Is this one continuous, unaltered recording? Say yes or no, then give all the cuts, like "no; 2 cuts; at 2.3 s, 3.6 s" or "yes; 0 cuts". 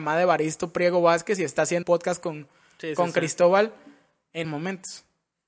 no; 2 cuts; at 1.8 s, 4.4 s